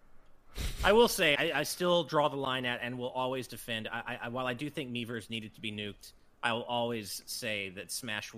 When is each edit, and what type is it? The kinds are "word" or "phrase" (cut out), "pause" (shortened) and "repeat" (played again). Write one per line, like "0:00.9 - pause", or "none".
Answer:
0:01.4 - word